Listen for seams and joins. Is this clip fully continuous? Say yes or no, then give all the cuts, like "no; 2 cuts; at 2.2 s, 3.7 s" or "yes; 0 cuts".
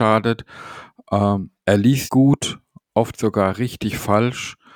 no; 1 cut; at 2.1 s